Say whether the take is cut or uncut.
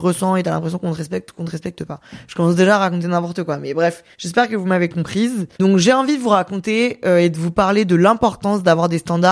cut